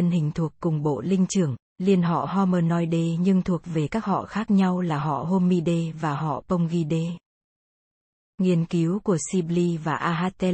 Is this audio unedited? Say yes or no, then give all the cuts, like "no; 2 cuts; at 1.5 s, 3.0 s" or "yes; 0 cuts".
yes; 0 cuts